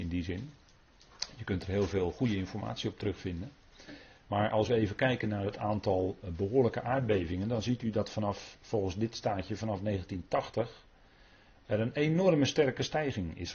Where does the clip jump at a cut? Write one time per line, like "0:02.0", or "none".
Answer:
none